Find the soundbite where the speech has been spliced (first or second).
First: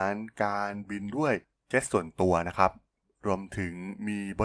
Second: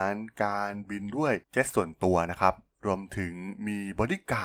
second